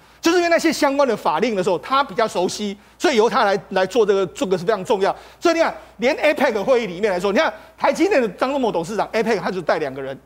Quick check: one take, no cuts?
yes; 0 cuts

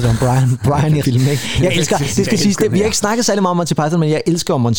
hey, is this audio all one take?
no; 1 cut; at 1.0 s

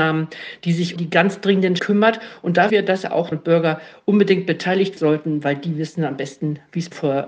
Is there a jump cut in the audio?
yes; 5 cuts; at 1.0 s, 1.8 s, 2.7 s, 3.3 s, 5.0 s

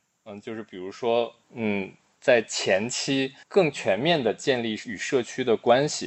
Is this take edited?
yes; 2 cuts; at 1.4 s, 3.4 s

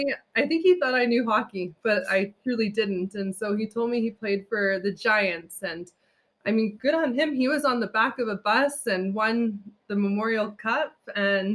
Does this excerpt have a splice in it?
no; 0 cuts

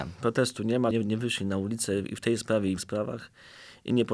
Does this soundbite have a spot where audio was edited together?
yes; 2 cuts; at 0.9 s, 2.8 s

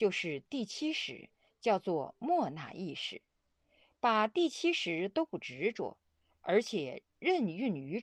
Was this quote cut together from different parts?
no; 0 cuts

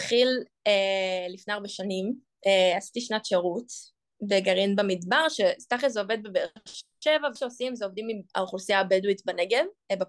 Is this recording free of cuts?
no; 1 cut; at 7.4 s

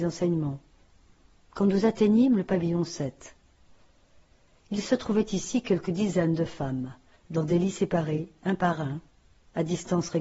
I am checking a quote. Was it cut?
no; 0 cuts

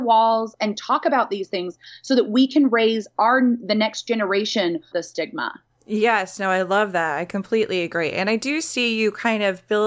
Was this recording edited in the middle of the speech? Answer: yes; 2 cuts; at 4.9 s, 5.7 s

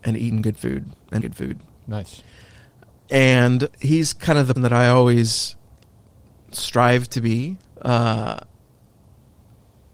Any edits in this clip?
yes; 4 cuts; at 1.2 s, 3.7 s, 4.6 s, 7.6 s

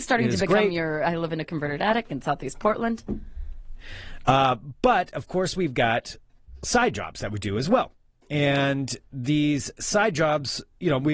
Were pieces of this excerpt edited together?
no; 0 cuts

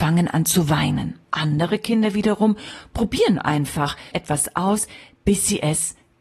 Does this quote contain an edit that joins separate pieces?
yes; 2 cuts; at 1.2 s, 4.1 s

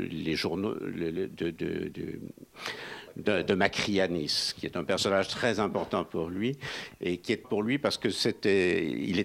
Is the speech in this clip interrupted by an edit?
yes; 1 cut; at 7.4 s

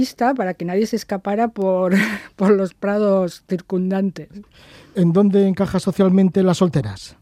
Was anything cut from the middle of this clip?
no; 0 cuts

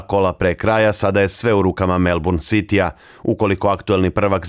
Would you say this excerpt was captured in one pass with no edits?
yes; 0 cuts

